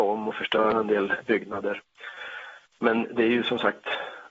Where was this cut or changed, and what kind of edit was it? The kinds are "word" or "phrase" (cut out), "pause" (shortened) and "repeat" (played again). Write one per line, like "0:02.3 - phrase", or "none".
0:01.2 - word